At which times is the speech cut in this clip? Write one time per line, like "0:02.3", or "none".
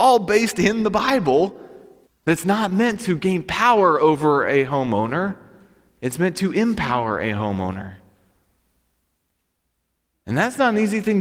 0:02.1